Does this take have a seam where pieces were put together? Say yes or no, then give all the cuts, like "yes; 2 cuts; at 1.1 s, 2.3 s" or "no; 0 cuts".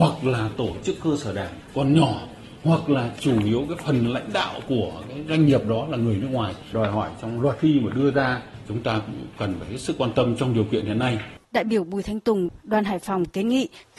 yes; 1 cut; at 11.4 s